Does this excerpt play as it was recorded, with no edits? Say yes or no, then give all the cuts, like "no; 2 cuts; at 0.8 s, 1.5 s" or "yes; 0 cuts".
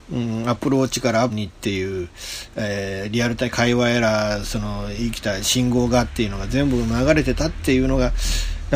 no; 1 cut; at 1.3 s